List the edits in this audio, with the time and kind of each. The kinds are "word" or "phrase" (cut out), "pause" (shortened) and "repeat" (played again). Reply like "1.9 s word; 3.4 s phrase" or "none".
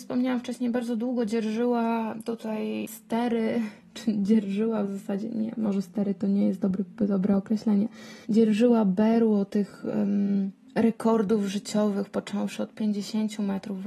8.2 s pause